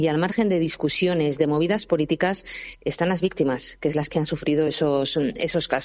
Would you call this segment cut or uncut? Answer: uncut